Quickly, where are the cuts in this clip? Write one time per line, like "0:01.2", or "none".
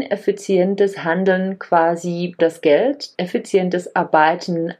0:02.4
0:03.2